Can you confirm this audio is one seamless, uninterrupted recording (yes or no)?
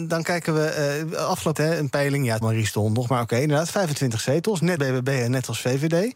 no